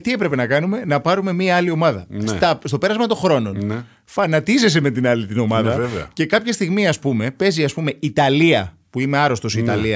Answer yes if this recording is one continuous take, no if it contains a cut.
yes